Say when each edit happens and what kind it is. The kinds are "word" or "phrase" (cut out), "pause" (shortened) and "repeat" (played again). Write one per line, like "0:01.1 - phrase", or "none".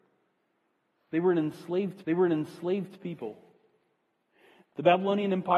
0:02.0 - repeat

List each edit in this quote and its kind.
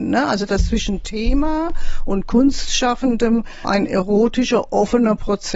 0:03.6 - word

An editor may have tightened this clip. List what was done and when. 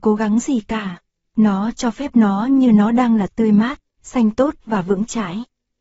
none

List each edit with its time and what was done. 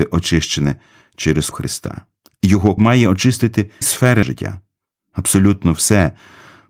0:01.5 - word
0:02.8 - word
0:03.8 - word
0:04.2 - word

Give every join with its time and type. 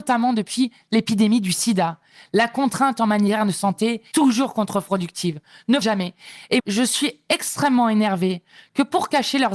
0:04.1 - word
0:05.8 - word
0:06.6 - word

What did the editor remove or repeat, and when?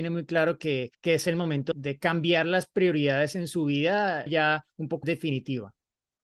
0:00.9 - pause
0:01.7 - word
0:04.3 - phrase
0:05.0 - word

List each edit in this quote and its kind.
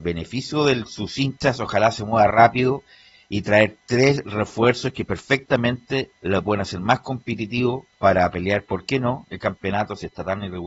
0:06.2 - pause
0:07.9 - pause

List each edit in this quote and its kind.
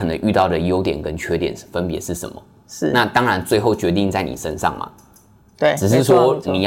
none

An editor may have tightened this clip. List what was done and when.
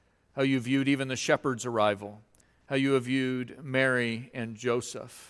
none

